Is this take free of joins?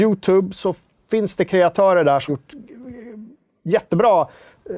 no; 1 cut; at 2.3 s

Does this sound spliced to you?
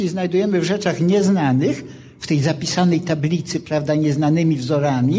no; 0 cuts

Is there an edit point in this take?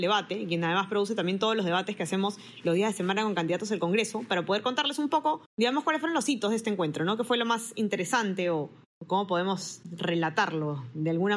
yes; 1 cut; at 5.5 s

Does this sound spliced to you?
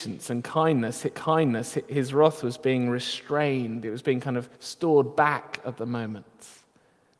yes; 2 cuts; at 1.1 s, 4.5 s

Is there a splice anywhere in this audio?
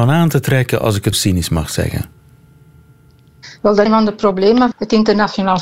yes; 3 cuts; at 1.1 s, 3.9 s, 4.7 s

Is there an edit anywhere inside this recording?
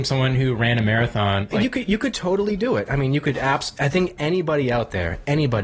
no; 0 cuts

